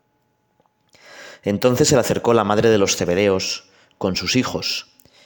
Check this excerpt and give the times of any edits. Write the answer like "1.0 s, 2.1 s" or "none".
none